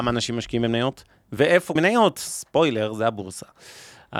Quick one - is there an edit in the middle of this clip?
yes; 1 cut; at 1.8 s

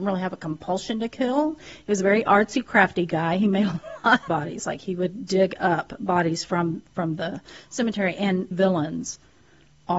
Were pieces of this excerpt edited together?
yes; 2 cuts; at 4.3 s, 8.5 s

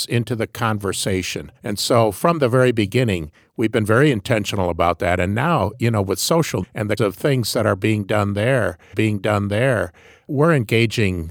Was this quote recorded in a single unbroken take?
no; 4 cuts; at 1.6 s, 6.6 s, 7.0 s, 8.9 s

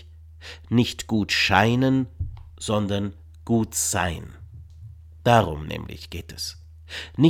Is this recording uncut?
yes; 0 cuts

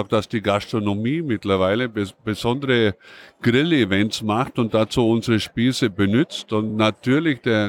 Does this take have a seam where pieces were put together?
no; 0 cuts

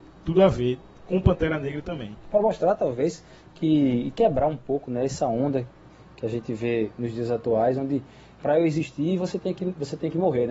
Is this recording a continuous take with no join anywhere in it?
yes; 0 cuts

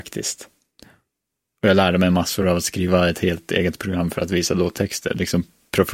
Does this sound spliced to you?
no; 0 cuts

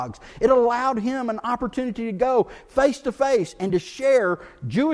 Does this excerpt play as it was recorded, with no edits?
yes; 0 cuts

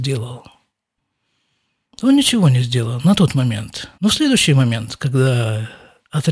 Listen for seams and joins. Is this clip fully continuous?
no; 1 cut; at 3.9 s

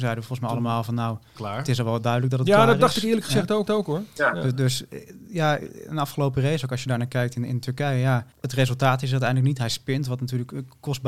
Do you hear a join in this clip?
yes; 3 cuts; at 1.4 s, 3.7 s, 8.3 s

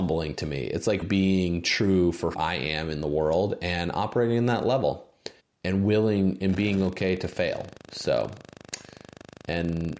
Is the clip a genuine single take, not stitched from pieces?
no; 4 cuts; at 1.0 s, 2.3 s, 5.4 s, 7.8 s

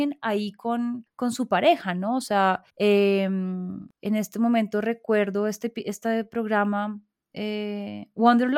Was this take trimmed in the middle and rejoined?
yes; 2 cuts; at 2.7 s, 3.9 s

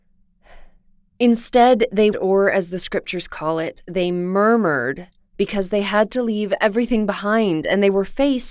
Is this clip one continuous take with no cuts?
no; 1 cut; at 2.1 s

